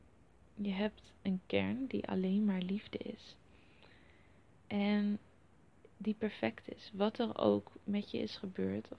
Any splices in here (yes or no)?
yes